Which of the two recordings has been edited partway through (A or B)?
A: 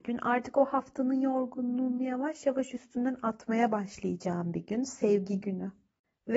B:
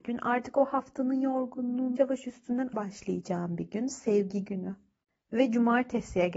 B